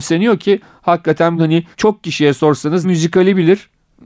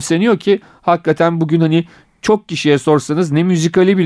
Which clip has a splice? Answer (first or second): first